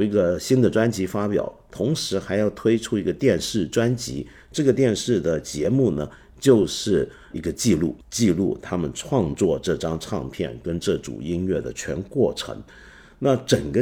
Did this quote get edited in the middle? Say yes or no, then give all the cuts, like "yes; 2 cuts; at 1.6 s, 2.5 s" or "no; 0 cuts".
yes; 1 cut; at 8.0 s